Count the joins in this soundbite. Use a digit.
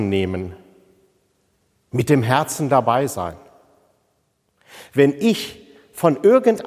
0